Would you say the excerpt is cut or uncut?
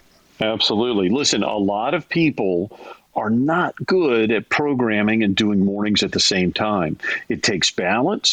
uncut